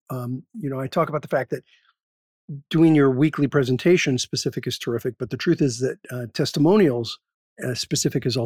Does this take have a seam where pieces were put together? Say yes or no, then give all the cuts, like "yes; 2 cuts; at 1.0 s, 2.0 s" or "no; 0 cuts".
no; 0 cuts